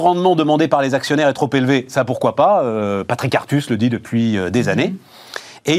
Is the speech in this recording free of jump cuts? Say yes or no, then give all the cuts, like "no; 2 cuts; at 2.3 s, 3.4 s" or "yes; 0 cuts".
yes; 0 cuts